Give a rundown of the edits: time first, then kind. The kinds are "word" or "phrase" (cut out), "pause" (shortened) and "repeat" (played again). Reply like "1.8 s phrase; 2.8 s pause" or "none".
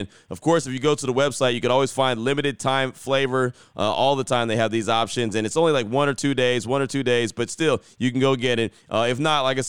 none